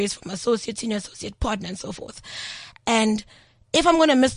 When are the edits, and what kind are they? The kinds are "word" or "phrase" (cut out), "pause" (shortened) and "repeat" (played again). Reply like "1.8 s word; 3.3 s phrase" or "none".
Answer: none